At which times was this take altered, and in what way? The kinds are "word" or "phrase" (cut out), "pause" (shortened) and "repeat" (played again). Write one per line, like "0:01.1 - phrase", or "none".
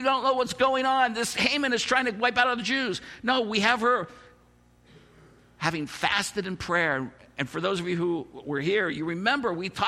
none